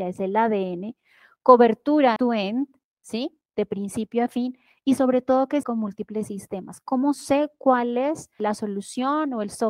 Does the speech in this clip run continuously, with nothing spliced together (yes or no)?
no